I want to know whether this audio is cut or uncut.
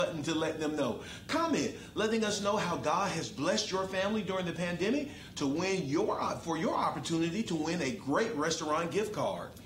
uncut